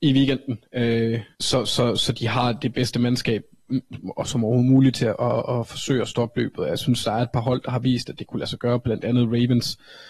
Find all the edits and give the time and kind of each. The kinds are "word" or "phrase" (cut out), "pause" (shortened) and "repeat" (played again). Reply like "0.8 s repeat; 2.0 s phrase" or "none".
1.3 s pause